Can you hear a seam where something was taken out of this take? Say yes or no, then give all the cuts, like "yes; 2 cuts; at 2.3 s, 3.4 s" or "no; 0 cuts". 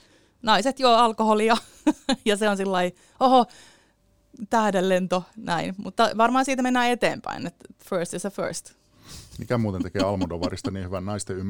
no; 0 cuts